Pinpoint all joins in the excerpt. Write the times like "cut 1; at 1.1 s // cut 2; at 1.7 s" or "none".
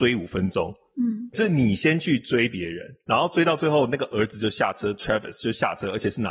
cut 1; at 1.3 s

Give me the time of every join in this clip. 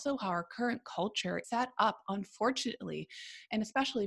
cut 1; at 1.4 s

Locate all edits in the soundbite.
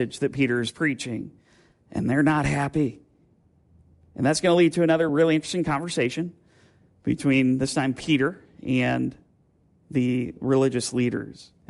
none

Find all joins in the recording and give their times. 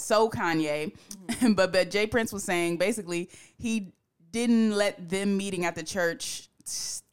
none

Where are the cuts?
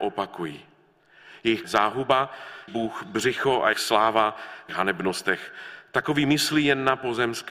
cut 1; at 1.6 s // cut 2; at 2.7 s // cut 3; at 3.7 s // cut 4; at 4.7 s

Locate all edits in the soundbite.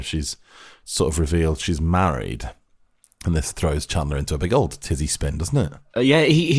none

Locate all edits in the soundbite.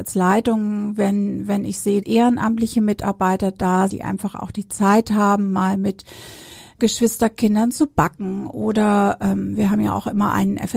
cut 1; at 2.0 s // cut 2; at 3.9 s // cut 3; at 6.8 s

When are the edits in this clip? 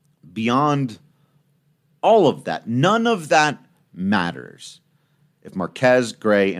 none

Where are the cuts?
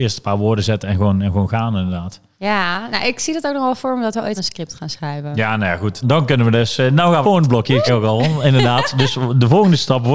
cut 1; at 4.4 s // cut 2; at 6.0 s // cut 3; at 7.2 s // cut 4; at 7.9 s

